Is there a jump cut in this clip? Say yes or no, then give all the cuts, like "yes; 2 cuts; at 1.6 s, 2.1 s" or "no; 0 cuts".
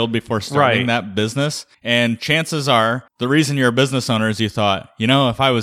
yes; 2 cuts; at 1.7 s, 3.1 s